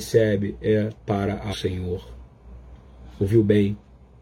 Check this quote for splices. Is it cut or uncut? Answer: cut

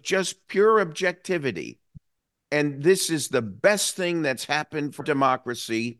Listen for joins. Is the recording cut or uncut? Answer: cut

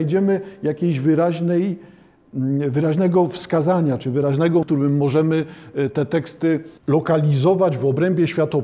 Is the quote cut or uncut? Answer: cut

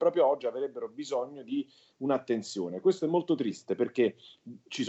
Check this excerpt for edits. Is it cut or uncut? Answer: uncut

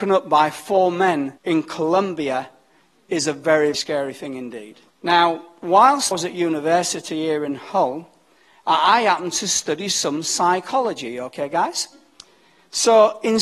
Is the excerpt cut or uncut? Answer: cut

